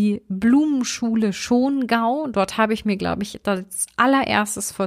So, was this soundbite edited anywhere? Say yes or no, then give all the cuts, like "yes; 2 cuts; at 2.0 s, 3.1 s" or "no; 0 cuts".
no; 0 cuts